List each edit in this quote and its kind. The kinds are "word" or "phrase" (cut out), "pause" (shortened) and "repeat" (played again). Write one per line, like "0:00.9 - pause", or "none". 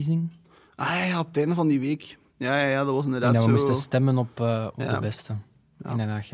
none